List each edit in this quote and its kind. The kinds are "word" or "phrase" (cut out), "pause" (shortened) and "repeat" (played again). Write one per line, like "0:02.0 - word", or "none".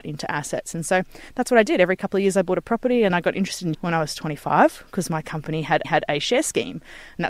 0:03.1 - word
0:03.7 - word
0:05.8 - repeat